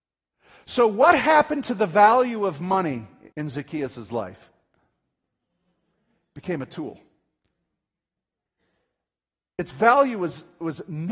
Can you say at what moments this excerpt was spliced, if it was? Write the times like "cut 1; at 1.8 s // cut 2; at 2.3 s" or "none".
cut 1; at 3.3 s